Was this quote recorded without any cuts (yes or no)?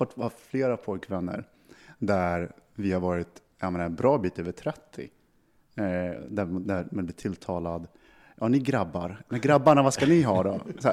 yes